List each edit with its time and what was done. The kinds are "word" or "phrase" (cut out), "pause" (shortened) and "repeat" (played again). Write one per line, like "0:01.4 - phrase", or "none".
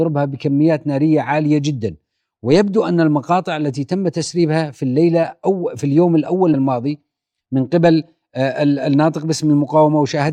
0:06.5 - word

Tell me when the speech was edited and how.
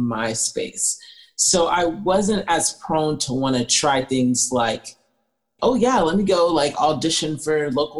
0:05.6 - word

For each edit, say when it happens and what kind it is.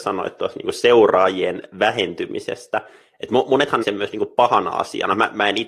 0:03.8 - word

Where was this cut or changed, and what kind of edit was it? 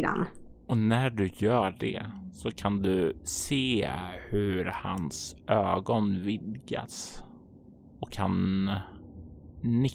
none

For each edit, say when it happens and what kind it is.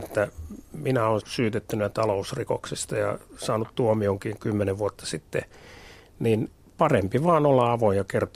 0:01.2 - phrase
0:06.6 - pause

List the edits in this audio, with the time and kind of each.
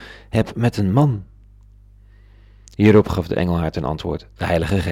none

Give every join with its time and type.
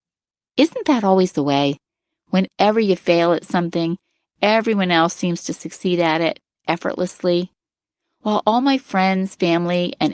none

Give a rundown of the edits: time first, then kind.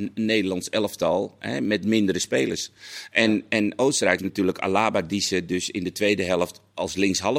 0:04.2 - word

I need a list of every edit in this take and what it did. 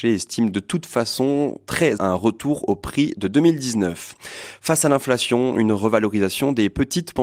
0:02.0 - word

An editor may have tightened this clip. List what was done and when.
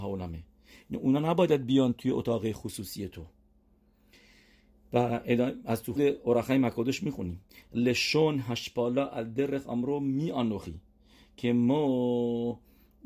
0:06.0 - word

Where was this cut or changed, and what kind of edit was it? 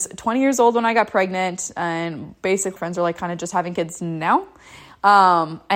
0:02.8 - phrase

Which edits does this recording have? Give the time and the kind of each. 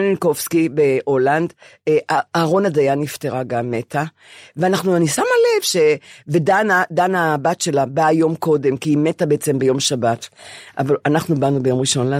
none

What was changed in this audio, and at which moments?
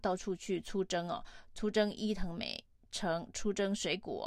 none

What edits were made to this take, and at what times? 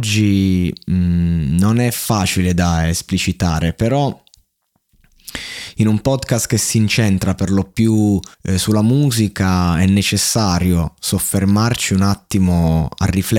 0:08.3 - pause

